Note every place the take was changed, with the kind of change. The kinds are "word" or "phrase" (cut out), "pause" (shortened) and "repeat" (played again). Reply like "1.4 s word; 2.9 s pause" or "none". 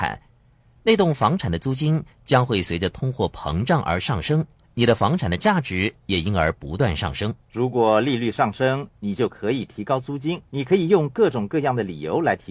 4.6 s pause; 7.4 s pause; 10.5 s pause